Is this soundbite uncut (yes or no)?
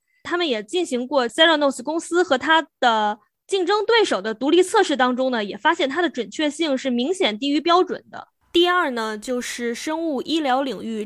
yes